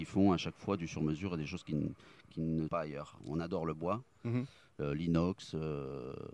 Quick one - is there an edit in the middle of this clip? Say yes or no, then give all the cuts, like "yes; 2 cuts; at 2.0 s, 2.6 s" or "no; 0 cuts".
yes; 1 cut; at 2.7 s